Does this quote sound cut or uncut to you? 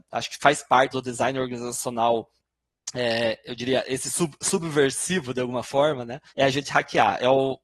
cut